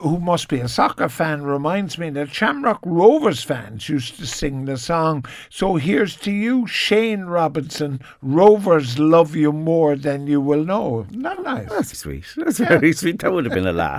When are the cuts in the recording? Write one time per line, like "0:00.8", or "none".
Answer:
0:11.9